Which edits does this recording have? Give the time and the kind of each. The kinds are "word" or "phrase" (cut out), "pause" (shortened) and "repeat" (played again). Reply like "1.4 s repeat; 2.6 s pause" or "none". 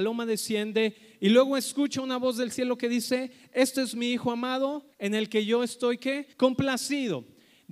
4.9 s pause; 6.3 s pause